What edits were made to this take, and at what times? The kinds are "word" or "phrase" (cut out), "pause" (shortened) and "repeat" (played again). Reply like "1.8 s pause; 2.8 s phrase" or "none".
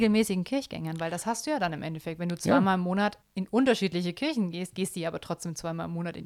3.2 s pause